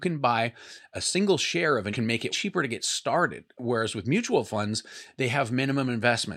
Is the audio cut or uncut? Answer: cut